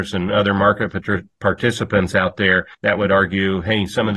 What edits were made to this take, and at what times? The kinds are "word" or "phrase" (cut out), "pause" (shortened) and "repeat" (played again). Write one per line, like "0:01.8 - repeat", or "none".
0:02.7 - pause